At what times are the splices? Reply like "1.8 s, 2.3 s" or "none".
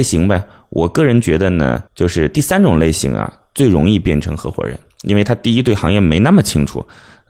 1.9 s